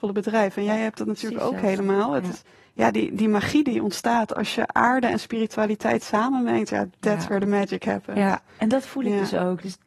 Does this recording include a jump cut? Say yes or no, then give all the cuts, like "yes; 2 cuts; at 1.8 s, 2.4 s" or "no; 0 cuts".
no; 0 cuts